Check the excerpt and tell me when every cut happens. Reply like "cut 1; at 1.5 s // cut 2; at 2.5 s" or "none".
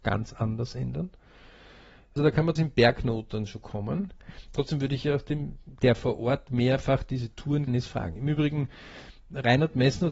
cut 1; at 2.2 s // cut 2; at 2.6 s // cut 3; at 7.7 s